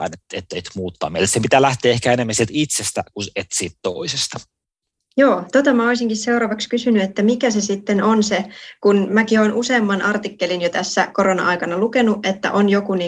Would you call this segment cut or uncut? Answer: uncut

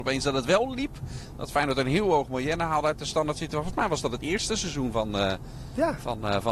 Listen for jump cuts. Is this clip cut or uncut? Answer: uncut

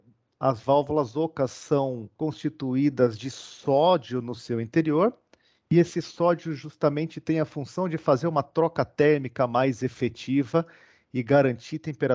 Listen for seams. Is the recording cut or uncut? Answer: uncut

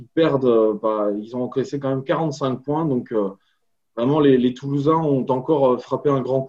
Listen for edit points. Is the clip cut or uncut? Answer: uncut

